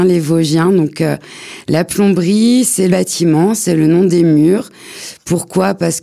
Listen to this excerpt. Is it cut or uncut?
cut